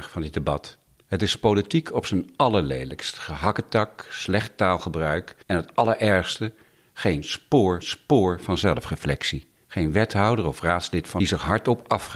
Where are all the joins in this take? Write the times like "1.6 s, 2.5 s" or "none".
5.4 s, 7.8 s, 9.6 s, 11.2 s